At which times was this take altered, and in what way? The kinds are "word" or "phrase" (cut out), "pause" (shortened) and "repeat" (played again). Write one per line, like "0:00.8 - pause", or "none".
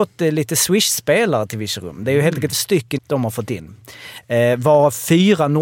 0:02.5 - word
0:03.0 - word